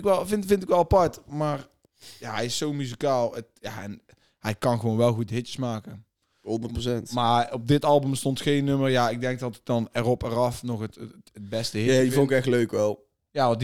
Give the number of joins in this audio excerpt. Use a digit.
0